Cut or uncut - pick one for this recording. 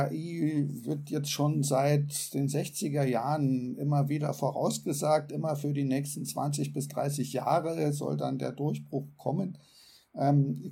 uncut